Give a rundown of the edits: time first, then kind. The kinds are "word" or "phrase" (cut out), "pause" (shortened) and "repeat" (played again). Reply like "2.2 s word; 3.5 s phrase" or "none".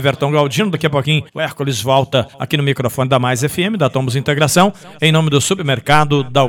1.3 s pause; 2.3 s pause